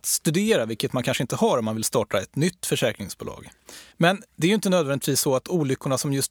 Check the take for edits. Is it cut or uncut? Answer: cut